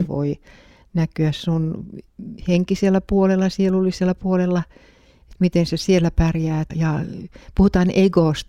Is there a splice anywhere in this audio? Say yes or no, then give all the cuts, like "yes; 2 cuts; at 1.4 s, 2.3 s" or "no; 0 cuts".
yes; 2 cuts; at 2.4 s, 6.7 s